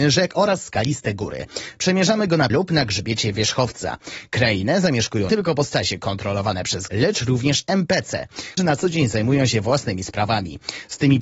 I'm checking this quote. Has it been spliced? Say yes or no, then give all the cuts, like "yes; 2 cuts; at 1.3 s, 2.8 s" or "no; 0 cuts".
yes; 4 cuts; at 2.5 s, 5.3 s, 6.9 s, 8.6 s